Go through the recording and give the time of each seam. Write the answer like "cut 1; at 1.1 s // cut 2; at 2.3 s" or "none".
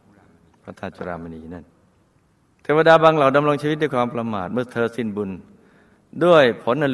none